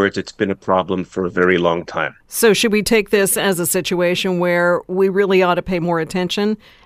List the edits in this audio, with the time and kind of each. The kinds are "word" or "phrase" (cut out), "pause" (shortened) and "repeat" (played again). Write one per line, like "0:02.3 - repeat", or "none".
0:02.2 - pause